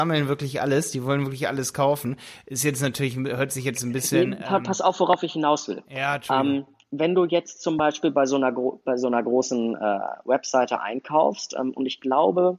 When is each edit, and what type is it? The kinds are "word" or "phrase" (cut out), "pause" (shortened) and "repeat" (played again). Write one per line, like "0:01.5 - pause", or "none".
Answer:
none